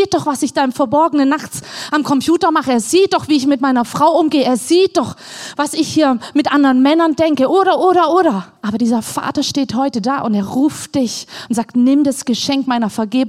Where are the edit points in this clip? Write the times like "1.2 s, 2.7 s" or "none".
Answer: 8.6 s